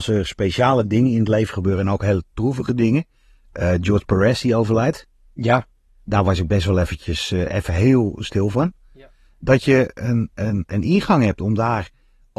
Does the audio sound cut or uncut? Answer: uncut